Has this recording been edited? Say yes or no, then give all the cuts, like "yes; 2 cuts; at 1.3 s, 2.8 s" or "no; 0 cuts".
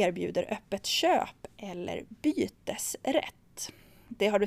no; 0 cuts